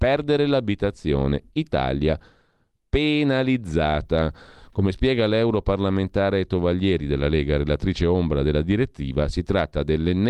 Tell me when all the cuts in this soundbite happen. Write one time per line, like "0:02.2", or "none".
none